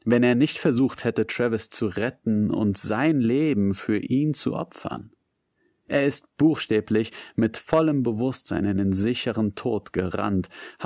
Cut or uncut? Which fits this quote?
uncut